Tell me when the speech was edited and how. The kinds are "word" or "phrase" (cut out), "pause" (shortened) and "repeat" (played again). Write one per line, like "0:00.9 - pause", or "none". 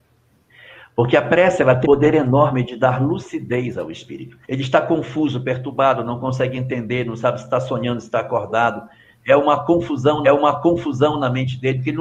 0:01.8 - word
0:04.4 - pause
0:10.2 - repeat